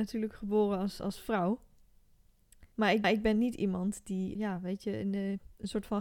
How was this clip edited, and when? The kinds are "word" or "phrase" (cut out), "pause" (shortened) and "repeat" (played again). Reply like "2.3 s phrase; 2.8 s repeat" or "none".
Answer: 2.7 s pause; 3.0 s repeat; 4.4 s word